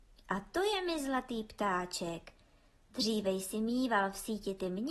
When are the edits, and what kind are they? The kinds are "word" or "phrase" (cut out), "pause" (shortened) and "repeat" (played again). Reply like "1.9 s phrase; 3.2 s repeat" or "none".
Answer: none